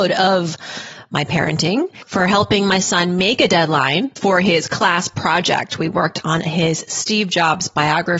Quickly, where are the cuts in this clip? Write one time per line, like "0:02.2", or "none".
none